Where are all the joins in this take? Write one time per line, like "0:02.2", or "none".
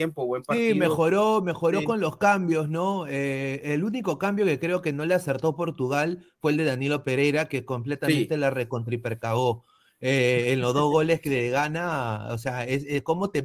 none

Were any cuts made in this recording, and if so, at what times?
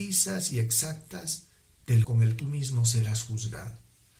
0:02.0
0:02.4

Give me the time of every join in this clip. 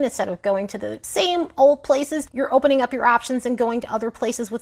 none

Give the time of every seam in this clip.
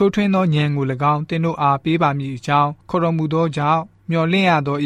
0:02.8

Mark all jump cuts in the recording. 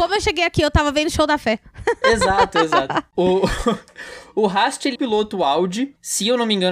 0:05.0

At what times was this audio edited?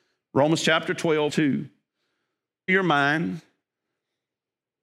0:01.3
0:02.7

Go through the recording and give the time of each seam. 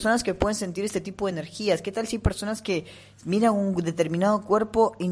none

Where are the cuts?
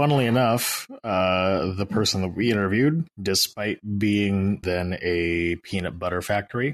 0:03.1
0:04.6

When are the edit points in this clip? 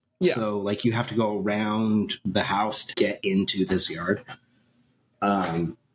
0:02.9

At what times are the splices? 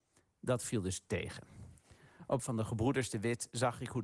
0:02.4

